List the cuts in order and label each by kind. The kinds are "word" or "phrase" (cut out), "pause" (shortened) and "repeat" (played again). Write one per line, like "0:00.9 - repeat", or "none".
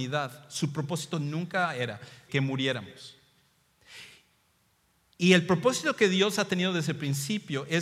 0:02.3 - word